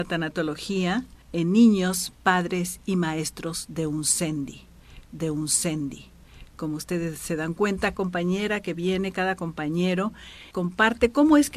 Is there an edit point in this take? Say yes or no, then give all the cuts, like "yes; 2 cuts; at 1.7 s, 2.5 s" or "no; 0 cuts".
yes; 5 cuts; at 1.2 s, 2.2 s, 5.1 s, 7.9 s, 10.5 s